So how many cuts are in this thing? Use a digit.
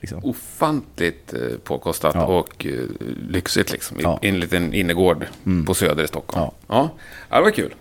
0